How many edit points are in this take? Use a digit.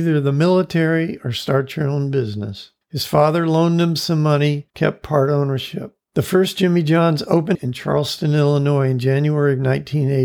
4